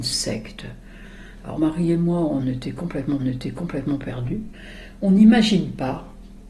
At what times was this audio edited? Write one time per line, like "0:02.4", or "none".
0:01.6
0:02.4
0:03.2